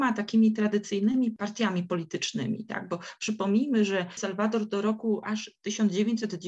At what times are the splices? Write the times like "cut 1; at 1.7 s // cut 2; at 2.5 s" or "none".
none